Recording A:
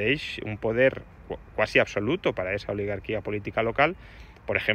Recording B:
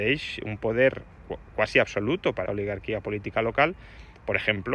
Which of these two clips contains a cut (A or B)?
B